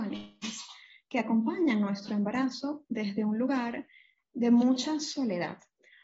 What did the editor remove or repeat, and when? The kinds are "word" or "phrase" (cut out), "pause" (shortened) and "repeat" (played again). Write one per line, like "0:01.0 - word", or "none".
none

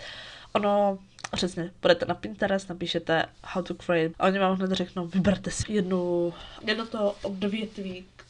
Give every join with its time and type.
0:04.1 - word
0:05.6 - word
0:06.6 - word

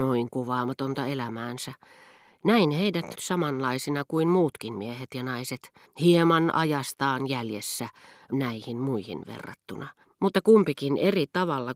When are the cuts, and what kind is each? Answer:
0:03.1 - word
0:05.9 - pause
0:08.3 - word
0:10.0 - pause

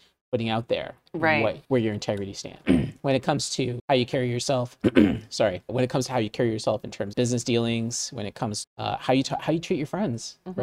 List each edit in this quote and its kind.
0:01.6 - pause
0:02.6 - phrase
0:03.8 - word
0:05.7 - word
0:07.1 - word
0:08.6 - word

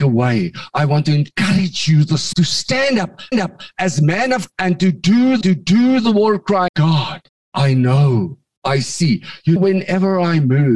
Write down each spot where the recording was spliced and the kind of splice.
0:02.3 - word
0:03.3 - repeat
0:04.5 - word
0:05.4 - repeat
0:06.7 - phrase
0:07.3 - pause
0:09.6 - word

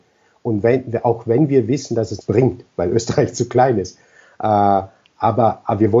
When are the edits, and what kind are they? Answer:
0:02.2 - word
0:02.7 - pause

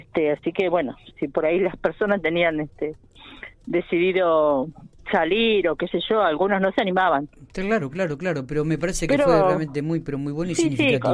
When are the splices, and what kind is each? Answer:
0:03.5 - pause

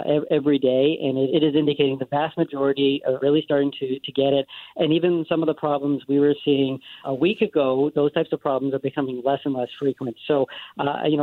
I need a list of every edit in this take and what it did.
0:01.3 - word
0:03.2 - phrase
0:07.0 - word

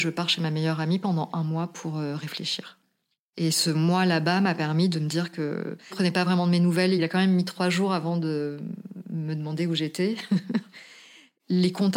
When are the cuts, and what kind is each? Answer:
0:05.9 - phrase

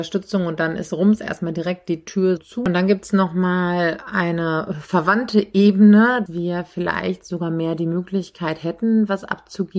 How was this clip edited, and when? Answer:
0:02.4 - word
0:06.3 - word

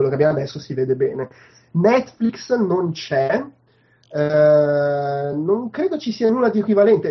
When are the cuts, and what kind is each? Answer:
none

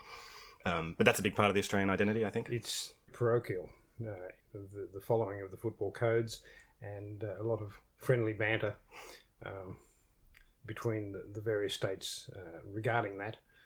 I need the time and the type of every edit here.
0:03.1 - word
0:04.4 - pause

